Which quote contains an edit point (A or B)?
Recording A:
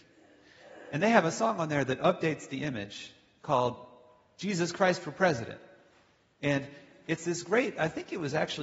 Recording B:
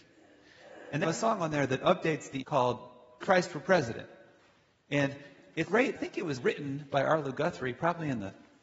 B